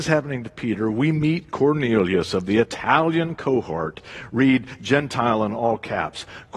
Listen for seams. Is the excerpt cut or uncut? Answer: uncut